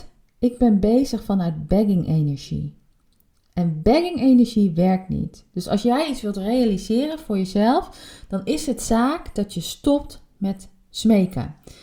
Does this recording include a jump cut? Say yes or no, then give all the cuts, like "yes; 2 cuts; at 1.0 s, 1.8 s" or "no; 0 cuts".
no; 0 cuts